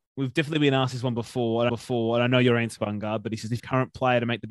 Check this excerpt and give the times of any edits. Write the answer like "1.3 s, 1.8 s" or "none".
1.7 s, 2.8 s, 3.6 s